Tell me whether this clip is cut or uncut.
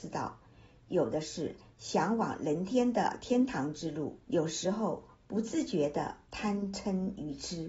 cut